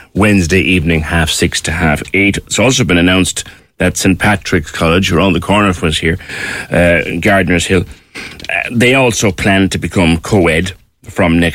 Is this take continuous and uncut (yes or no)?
yes